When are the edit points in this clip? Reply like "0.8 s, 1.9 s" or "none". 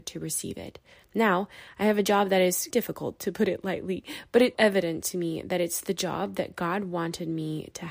0.9 s, 2.7 s, 4.5 s